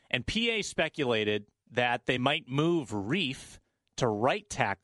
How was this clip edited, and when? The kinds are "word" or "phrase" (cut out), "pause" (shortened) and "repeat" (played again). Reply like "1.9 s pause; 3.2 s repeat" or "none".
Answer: none